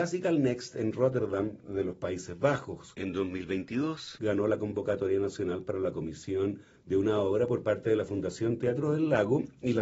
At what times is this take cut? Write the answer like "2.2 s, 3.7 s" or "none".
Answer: none